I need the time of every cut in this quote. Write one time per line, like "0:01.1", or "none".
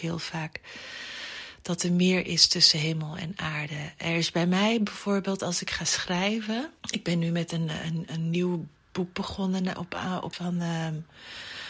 0:06.8
0:10.3